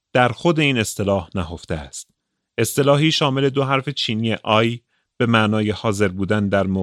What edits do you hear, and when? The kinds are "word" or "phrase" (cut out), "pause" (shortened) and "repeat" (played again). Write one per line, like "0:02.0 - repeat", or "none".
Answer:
none